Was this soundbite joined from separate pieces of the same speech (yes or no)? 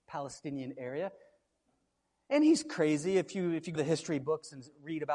yes